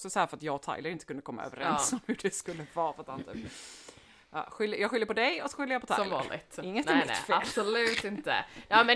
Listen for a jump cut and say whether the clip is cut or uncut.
uncut